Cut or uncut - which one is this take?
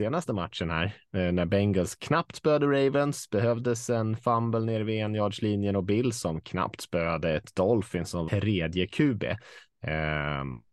cut